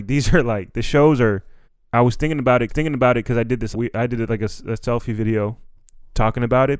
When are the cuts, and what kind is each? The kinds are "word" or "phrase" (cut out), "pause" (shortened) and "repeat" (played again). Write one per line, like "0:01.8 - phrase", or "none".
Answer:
0:01.6 - pause
0:02.7 - repeat
0:03.7 - word